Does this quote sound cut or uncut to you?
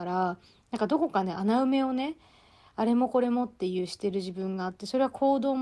uncut